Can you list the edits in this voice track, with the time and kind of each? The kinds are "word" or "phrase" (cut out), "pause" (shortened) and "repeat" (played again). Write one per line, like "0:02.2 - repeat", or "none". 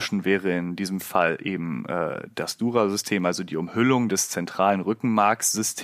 none